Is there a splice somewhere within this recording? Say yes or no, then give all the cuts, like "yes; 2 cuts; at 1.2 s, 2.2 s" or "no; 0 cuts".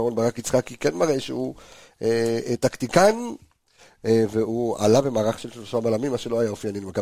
no; 0 cuts